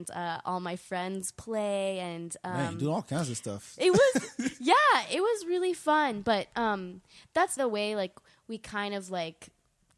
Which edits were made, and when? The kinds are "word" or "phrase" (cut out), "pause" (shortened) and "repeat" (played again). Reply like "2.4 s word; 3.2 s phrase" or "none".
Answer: 7.6 s word